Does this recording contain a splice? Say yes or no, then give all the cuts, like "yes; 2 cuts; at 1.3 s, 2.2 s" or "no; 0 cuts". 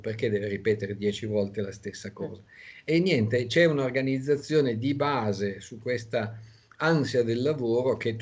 no; 0 cuts